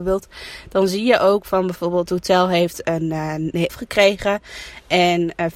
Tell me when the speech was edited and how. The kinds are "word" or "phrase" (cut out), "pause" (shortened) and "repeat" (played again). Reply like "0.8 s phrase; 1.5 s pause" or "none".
2.1 s word; 3.7 s word